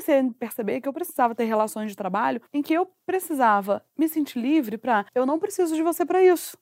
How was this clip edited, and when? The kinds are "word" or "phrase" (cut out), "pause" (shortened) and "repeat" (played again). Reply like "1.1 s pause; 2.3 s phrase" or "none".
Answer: 2.5 s pause; 5.1 s pause